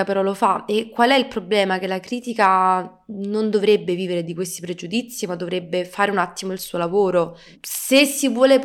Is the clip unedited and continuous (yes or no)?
yes